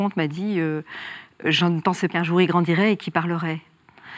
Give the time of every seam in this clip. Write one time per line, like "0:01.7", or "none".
0:02.1